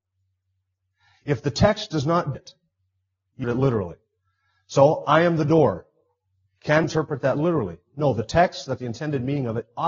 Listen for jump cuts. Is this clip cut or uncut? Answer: cut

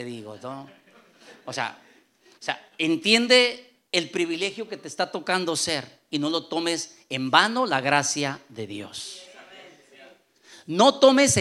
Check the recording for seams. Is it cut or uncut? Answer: uncut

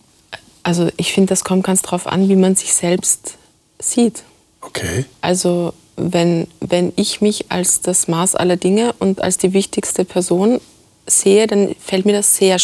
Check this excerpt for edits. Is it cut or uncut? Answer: uncut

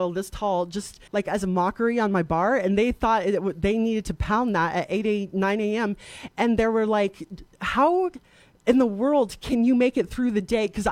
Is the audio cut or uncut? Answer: cut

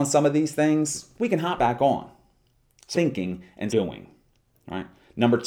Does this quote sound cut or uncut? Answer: cut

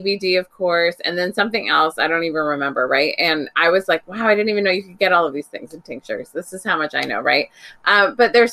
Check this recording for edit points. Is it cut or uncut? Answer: uncut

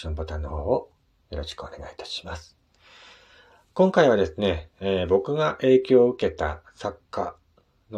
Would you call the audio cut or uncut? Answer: uncut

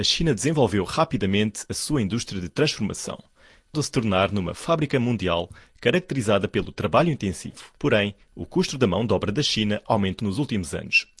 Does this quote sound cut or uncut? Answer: cut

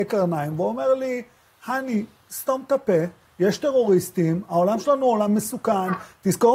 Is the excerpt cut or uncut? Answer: uncut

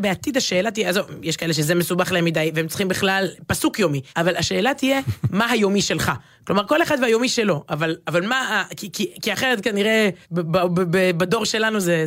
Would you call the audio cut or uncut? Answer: cut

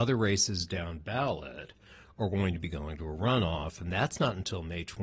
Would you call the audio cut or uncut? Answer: uncut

